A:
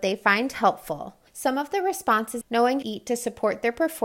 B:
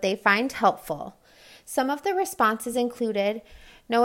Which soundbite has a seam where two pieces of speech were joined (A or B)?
A